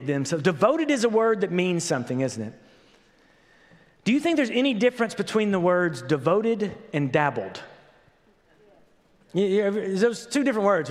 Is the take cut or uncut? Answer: uncut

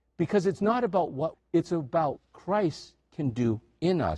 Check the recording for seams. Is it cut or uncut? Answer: cut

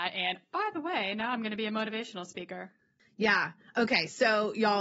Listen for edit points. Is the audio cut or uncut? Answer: cut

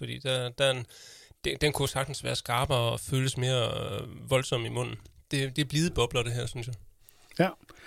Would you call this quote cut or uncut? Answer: uncut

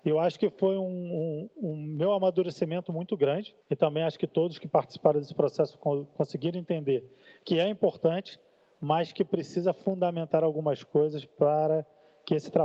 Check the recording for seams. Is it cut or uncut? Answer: cut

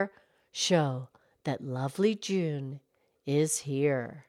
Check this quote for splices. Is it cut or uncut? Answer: uncut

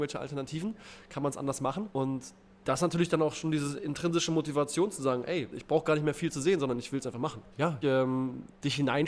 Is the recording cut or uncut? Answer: cut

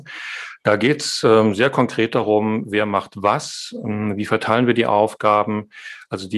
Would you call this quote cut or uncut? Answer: uncut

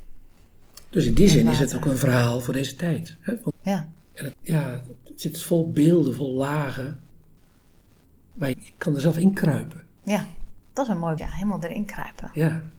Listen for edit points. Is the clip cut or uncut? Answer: cut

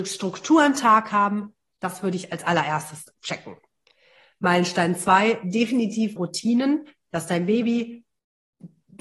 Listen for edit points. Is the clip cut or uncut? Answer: cut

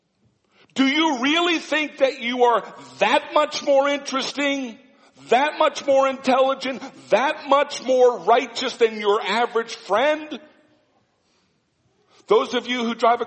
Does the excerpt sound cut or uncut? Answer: uncut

